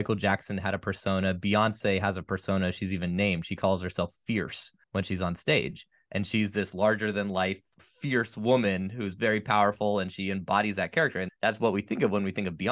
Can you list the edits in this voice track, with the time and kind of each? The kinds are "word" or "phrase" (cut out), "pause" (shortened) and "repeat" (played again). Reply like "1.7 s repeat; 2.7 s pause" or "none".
4.8 s pause